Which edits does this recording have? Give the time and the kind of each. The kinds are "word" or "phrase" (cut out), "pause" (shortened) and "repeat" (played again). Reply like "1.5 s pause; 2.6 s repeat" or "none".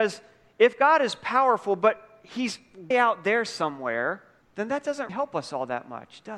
2.9 s word; 4.4 s pause; 5.1 s word